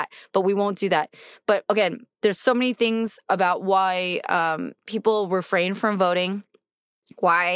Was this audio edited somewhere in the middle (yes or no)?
no